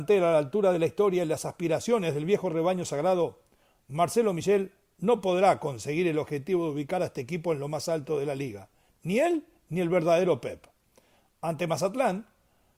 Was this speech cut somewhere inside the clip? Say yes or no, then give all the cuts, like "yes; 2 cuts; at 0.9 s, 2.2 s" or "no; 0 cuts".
no; 0 cuts